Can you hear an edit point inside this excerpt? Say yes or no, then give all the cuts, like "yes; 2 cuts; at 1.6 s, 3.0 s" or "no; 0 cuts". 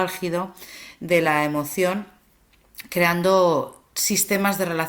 no; 0 cuts